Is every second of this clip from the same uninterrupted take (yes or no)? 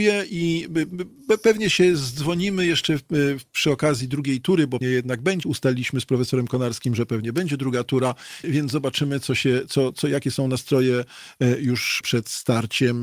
no